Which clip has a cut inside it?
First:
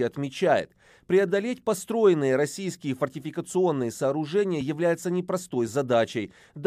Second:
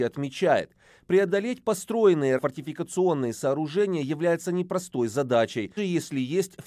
second; 2 cuts; at 2.4 s, 5.8 s

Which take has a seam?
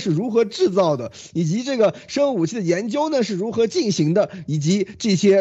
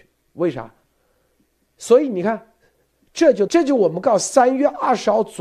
second; 1 cut; at 3.5 s

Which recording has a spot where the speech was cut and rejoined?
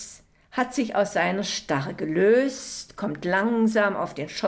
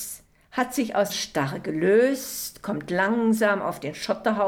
second; 1 cut; at 1.1 s

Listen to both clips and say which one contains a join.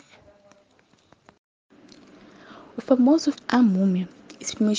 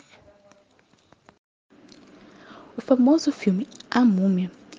first; 1 cut; at 3.3 s

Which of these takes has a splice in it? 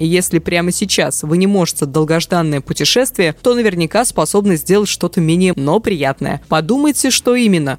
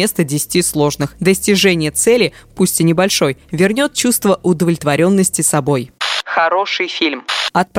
first; 2 cuts; at 1.8 s, 5.5 s

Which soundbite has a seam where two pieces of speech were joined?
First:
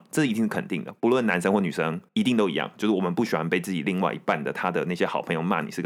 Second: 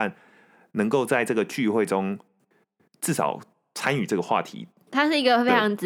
first; 1 cut; at 2.1 s

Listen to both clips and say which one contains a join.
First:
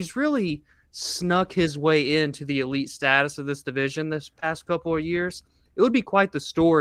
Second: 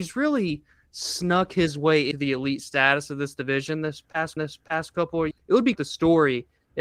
second; 4 cuts; at 2.1 s, 4.4 s, 5.3 s, 5.8 s

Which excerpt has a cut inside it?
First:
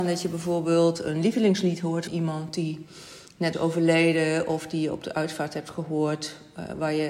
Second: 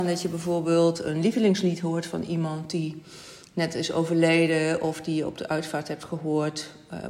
first; 2 cuts; at 2.1 s, 3.5 s

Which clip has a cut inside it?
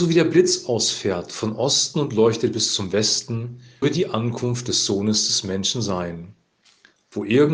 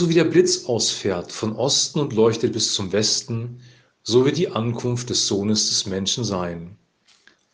first; 1 cut; at 3.8 s

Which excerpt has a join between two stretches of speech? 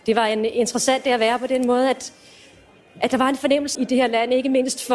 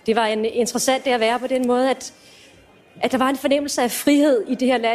first; 1 cut; at 3.7 s

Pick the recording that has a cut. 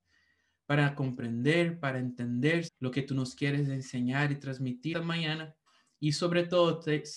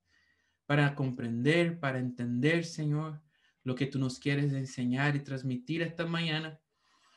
first; 3 cuts; at 2.7 s, 4.9 s, 5.7 s

